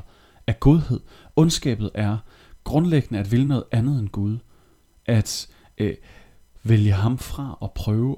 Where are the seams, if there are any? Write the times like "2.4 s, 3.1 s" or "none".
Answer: none

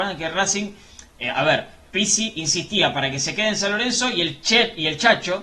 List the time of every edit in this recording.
none

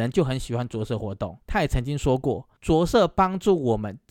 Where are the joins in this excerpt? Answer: 1.4 s, 2.6 s

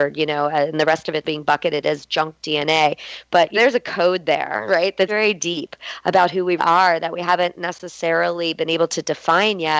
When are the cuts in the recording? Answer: 1.2 s, 3.5 s, 5.1 s, 6.6 s

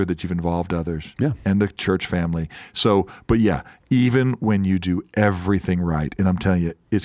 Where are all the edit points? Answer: none

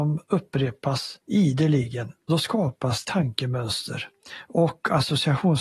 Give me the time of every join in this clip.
3.0 s

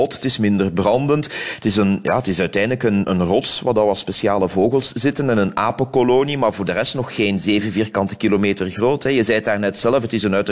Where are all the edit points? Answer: 3.0 s

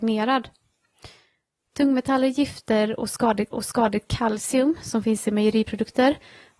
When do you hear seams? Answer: 3.5 s

